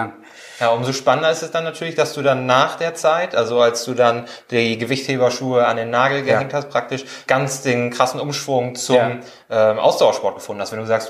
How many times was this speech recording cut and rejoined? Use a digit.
1